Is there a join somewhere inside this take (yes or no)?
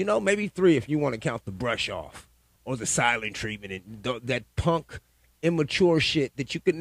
no